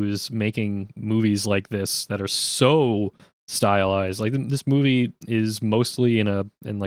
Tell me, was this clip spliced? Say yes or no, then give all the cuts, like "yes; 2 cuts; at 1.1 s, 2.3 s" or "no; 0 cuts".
no; 0 cuts